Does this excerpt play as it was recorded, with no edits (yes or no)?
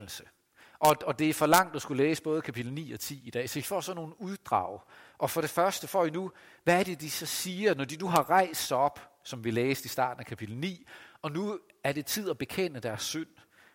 yes